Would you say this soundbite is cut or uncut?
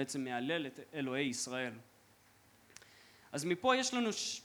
uncut